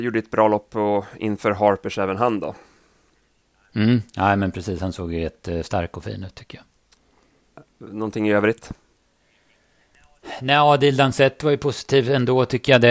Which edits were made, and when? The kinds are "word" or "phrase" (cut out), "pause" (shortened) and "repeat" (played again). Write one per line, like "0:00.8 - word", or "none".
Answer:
none